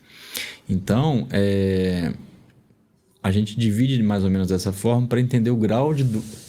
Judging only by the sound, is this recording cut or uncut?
uncut